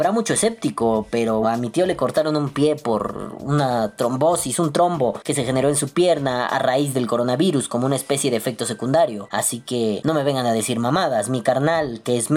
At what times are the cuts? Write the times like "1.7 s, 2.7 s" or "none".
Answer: 1.4 s